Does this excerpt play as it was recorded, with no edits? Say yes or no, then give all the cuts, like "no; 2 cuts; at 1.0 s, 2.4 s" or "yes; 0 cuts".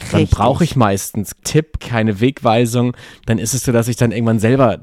no; 3 cuts; at 1.4 s, 1.8 s, 3.6 s